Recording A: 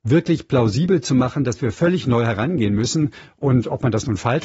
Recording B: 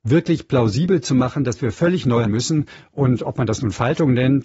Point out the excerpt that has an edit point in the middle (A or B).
B